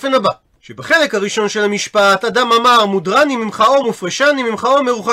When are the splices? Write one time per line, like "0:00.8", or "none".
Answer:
none